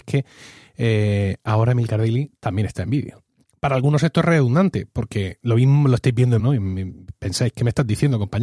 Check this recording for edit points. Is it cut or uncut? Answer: cut